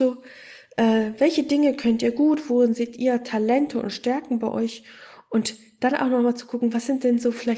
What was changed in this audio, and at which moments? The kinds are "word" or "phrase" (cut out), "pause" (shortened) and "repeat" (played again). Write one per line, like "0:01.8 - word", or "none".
none